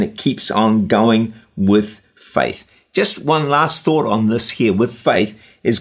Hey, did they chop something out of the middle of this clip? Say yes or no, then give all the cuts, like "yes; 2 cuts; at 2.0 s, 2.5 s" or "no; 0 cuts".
no; 0 cuts